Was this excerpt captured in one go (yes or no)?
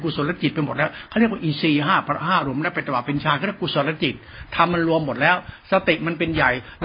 yes